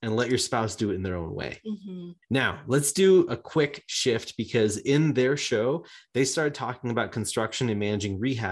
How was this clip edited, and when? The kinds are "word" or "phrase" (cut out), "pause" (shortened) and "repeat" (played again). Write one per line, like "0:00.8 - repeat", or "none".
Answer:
0:02.2 - pause